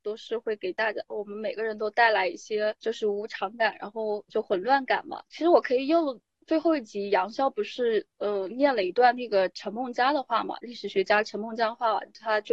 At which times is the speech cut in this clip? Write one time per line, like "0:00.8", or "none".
0:02.8
0:04.3
0:05.3